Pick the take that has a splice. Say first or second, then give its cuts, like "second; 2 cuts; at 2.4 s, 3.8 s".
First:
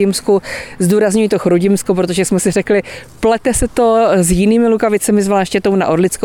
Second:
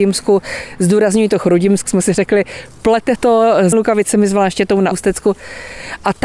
second; 4 cuts; at 1.9 s, 3.2 s, 3.7 s, 4.9 s